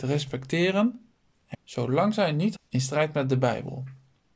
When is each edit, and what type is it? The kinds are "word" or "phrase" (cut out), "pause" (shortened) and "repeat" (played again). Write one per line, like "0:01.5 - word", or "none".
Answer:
0:01.5 - word
0:02.6 - word